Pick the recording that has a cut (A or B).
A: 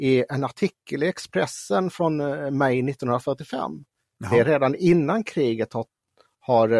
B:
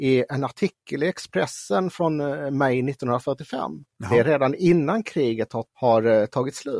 B